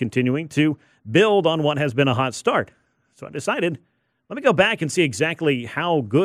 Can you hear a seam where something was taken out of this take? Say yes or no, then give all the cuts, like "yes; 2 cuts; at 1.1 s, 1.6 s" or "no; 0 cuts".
no; 0 cuts